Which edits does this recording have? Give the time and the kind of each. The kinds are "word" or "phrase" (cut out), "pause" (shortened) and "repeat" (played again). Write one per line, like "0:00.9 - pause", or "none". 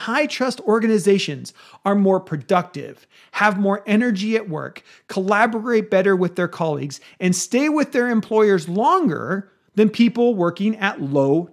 none